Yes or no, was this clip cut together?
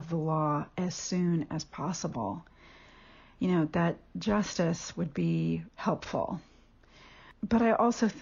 yes